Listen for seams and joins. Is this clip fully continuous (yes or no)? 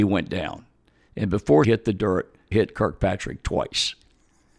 no